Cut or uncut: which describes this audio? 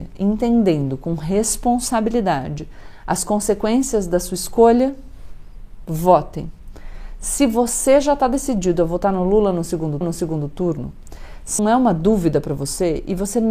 cut